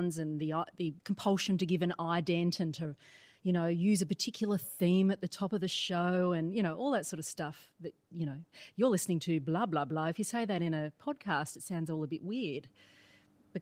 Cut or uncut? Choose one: cut